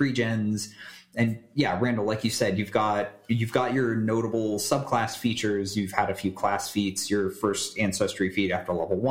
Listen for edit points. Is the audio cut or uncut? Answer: uncut